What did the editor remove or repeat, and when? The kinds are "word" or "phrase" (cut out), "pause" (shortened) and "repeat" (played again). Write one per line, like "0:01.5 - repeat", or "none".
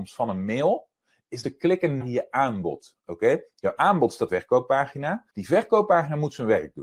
0:01.4 - word
0:02.0 - word
0:04.3 - phrase
0:05.3 - pause